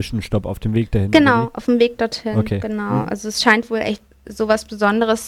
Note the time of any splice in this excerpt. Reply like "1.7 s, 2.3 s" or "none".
4.1 s